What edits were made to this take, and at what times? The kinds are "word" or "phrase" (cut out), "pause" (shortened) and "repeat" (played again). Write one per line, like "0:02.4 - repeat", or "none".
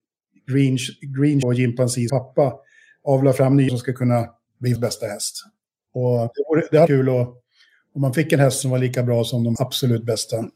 0:01.4 - word
0:02.1 - word
0:03.7 - word
0:04.8 - word
0:06.9 - word
0:09.6 - word